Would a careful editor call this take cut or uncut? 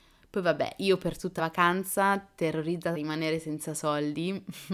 cut